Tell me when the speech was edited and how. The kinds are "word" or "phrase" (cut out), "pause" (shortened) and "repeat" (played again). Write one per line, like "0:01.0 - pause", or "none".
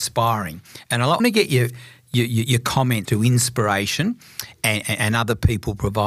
0:01.2 - word
0:03.0 - phrase
0:04.8 - word

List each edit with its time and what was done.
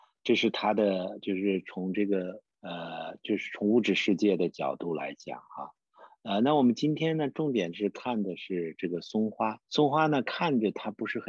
0:02.5 - pause
0:09.6 - pause

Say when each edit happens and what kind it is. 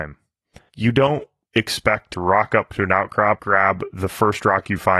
0:02.1 - word
0:03.4 - word

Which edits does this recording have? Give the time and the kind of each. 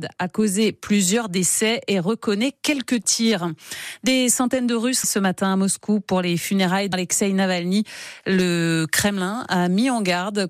0:05.0 - word
0:06.9 - word

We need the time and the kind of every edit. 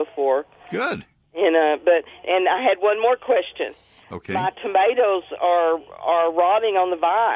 none

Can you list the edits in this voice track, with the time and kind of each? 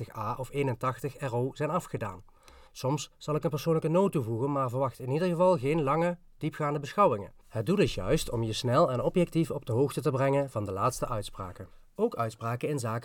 0:02.7 - pause
0:07.4 - pause

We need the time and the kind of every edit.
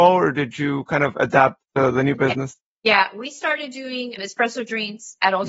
0:01.6 - pause
0:02.7 - pause

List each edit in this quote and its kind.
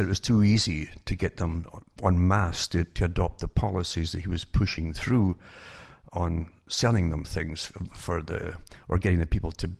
none

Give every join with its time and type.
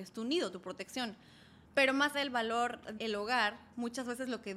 0:01.6 - pause
0:02.1 - word
0:03.0 - word

